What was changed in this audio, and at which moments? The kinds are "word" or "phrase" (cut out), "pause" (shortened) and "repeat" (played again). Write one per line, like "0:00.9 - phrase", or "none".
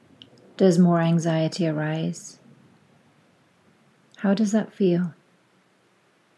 none